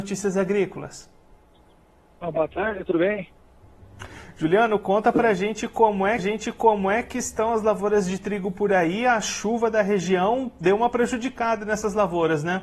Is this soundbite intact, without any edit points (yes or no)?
no